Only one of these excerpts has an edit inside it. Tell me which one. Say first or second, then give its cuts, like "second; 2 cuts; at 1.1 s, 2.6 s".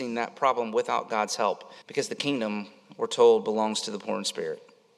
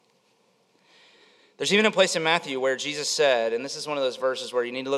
first; 1 cut; at 1.8 s